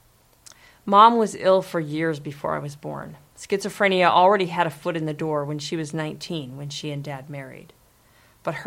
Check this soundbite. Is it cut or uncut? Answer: uncut